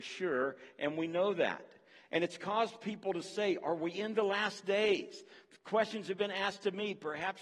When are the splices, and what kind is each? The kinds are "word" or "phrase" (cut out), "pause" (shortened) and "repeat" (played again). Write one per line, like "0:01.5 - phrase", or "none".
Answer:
none